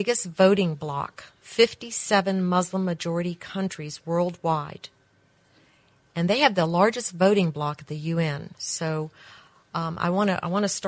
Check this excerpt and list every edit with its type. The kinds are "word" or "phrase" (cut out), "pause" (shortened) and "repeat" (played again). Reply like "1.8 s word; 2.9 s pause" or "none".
none